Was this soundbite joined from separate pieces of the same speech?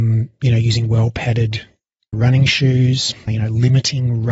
yes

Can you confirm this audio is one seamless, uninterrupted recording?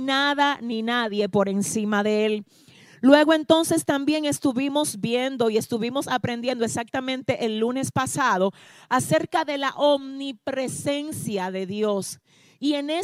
yes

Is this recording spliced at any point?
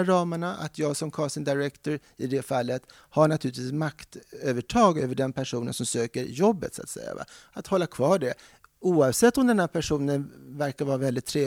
no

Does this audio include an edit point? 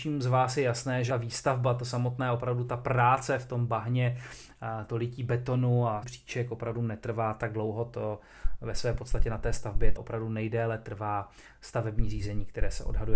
yes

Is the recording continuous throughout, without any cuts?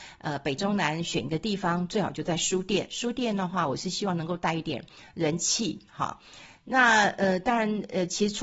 yes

